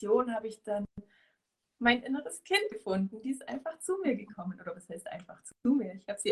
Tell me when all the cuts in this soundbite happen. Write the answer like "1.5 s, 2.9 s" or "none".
none